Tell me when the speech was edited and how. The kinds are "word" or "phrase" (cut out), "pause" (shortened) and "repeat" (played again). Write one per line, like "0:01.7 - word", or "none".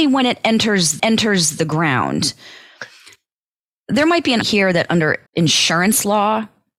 0:01.0 - repeat
0:04.4 - word
0:05.3 - pause